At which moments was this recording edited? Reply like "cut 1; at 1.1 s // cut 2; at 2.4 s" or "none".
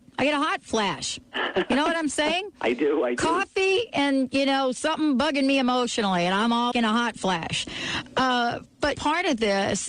cut 1; at 6.7 s // cut 2; at 9.0 s